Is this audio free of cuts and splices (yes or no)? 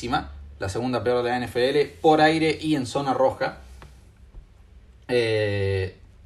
yes